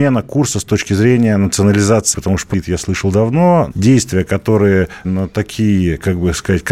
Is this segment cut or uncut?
cut